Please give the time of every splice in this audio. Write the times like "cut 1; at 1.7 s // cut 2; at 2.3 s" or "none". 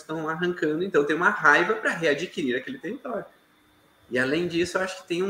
none